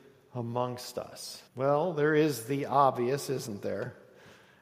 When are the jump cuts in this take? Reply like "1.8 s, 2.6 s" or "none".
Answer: 1.5 s